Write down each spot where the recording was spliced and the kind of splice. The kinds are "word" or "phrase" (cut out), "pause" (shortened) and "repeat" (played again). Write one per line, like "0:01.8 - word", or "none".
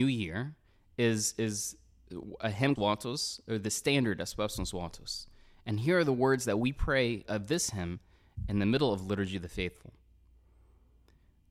0:02.8 - phrase
0:07.3 - word